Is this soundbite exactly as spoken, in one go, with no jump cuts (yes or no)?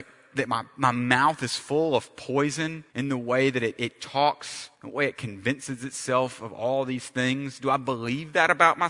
no